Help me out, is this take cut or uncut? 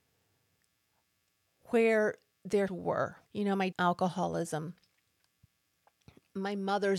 cut